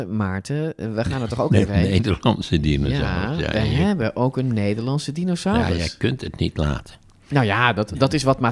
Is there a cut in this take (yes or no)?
no